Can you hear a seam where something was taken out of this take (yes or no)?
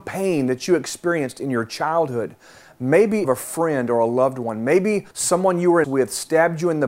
yes